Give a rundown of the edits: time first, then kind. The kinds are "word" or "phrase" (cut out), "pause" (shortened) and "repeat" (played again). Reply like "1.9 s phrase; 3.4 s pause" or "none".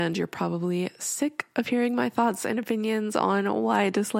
none